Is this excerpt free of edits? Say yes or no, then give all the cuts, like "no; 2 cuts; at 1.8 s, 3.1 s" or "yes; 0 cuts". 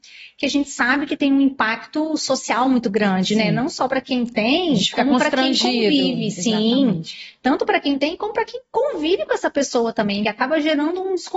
yes; 0 cuts